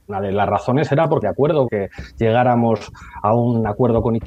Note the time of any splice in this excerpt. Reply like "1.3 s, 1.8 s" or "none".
1.2 s, 1.7 s